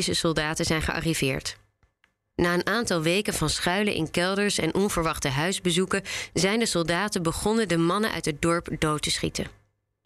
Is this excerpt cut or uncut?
uncut